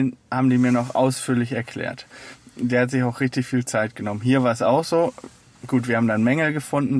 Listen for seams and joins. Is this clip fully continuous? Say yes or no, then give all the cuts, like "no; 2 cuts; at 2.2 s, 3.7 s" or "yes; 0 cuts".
yes; 0 cuts